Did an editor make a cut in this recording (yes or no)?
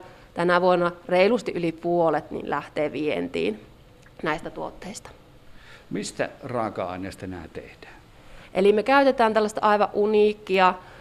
no